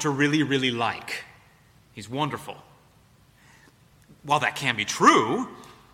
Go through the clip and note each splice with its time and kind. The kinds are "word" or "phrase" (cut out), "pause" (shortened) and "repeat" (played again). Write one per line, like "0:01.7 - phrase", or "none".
none

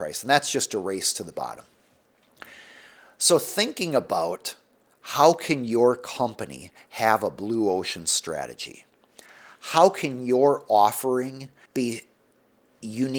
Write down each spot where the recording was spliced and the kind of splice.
0:11.7 - pause

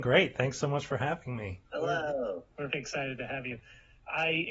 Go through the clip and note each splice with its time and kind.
0:02.7 - word

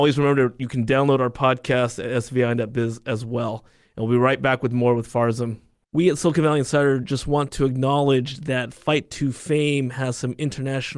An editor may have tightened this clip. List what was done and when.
none

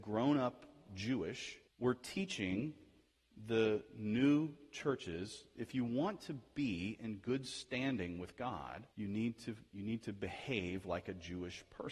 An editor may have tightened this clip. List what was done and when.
0:01.7 - pause
0:08.9 - pause

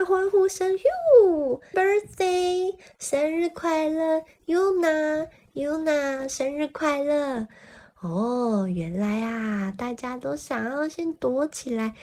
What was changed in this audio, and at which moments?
0:01.7 - word

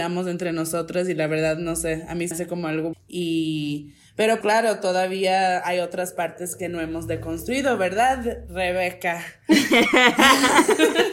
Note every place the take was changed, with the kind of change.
0:02.3 - word
0:02.9 - word
0:04.4 - word

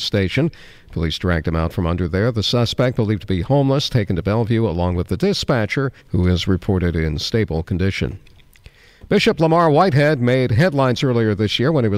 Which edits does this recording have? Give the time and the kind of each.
0:06.0 - pause

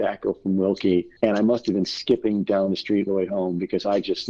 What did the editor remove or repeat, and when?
0:01.2 - pause
0:03.1 - word

